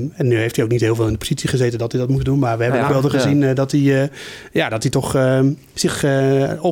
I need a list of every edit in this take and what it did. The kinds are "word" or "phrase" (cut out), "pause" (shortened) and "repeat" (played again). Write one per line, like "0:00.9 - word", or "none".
0:02.9 - phrase